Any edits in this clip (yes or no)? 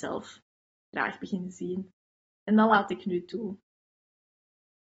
no